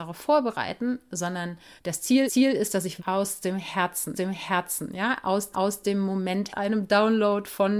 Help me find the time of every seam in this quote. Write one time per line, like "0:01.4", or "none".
0:01.8
0:02.3
0:03.0
0:04.1
0:05.5
0:06.5